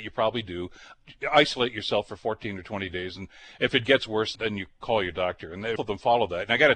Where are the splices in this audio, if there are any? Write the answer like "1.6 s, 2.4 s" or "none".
4.3 s, 5.8 s